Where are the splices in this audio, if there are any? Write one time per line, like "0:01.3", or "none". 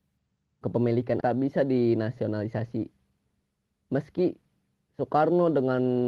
0:01.2